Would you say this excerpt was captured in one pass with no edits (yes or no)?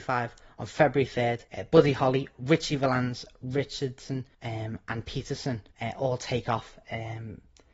no